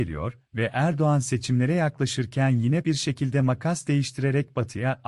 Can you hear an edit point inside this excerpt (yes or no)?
yes